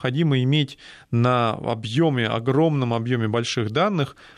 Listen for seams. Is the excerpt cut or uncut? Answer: uncut